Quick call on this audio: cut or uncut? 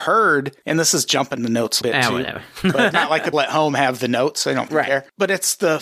cut